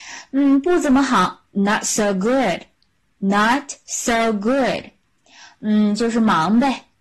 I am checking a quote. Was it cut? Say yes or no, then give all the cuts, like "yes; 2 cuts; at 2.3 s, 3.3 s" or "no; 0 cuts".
no; 0 cuts